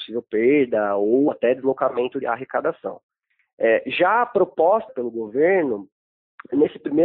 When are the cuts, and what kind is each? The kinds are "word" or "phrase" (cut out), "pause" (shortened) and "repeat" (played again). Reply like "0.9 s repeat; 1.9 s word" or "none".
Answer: 2.2 s word; 4.9 s word

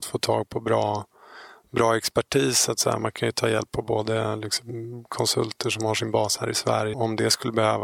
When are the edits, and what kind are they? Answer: 6.9 s word

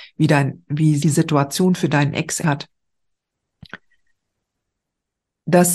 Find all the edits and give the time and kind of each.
1.0 s word; 2.4 s word

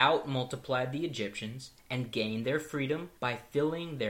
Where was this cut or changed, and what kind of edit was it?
3.2 s pause

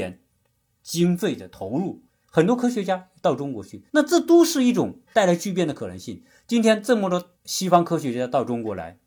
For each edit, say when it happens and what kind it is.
2.1 s pause; 3.9 s pause; 5.0 s pause; 7.4 s pause

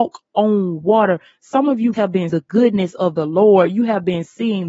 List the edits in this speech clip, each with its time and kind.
1.9 s word; 2.3 s word

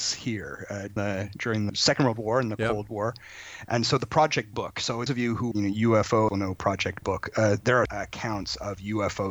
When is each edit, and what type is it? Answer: 1.0 s word; 1.7 s word; 4.5 s word; 5.1 s word; 5.5 s word; 6.3 s word; 7.0 s word; 7.9 s word

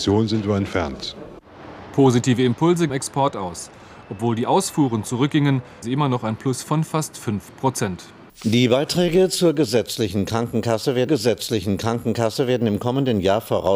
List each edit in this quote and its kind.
2.9 s phrase; 5.8 s word; 8.3 s pause; 11.1 s repeat

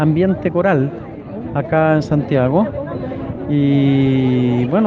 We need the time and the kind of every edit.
none

